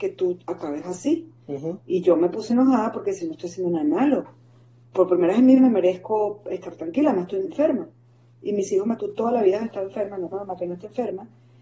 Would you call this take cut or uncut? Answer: cut